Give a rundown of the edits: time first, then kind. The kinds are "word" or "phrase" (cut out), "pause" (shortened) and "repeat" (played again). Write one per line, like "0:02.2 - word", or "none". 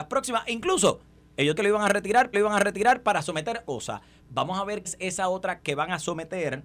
0:01.6 - word
0:02.3 - repeat
0:03.6 - word
0:04.8 - word
0:05.6 - word